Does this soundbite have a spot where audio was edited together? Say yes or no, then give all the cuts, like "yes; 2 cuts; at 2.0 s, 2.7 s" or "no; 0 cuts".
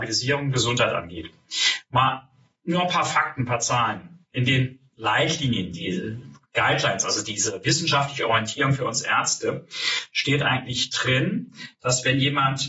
no; 0 cuts